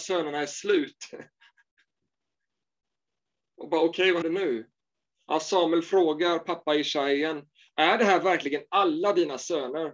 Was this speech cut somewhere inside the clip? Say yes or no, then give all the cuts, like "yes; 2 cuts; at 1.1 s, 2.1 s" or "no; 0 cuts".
yes; 1 cut; at 4.2 s